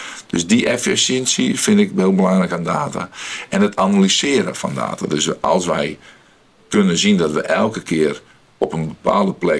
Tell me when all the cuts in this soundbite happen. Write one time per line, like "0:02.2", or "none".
none